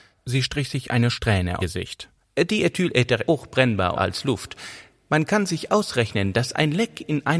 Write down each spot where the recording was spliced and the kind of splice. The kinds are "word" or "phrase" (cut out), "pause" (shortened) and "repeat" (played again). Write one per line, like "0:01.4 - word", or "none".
0:01.6 - phrase
0:03.3 - word
0:03.9 - phrase